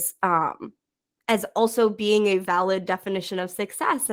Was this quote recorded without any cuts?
yes; 0 cuts

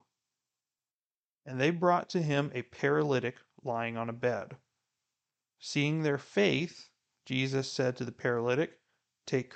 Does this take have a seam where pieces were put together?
no; 0 cuts

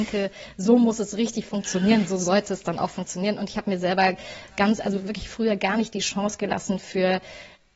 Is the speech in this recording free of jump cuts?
yes; 0 cuts

